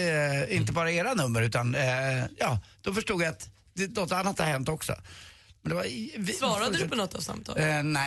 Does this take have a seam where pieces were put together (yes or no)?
no